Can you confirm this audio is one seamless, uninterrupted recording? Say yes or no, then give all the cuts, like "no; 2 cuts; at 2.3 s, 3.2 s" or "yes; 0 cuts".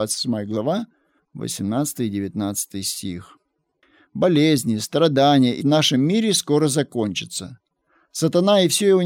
no; 1 cut; at 5.6 s